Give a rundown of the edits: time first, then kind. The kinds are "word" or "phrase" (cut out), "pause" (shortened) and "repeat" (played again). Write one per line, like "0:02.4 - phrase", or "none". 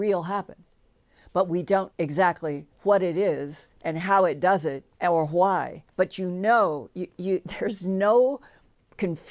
0:01.9 - word
0:02.7 - pause
0:03.7 - pause
0:04.9 - pause
0:05.9 - pause
0:07.1 - word